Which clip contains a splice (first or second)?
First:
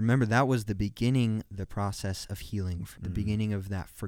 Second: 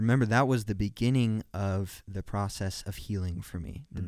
first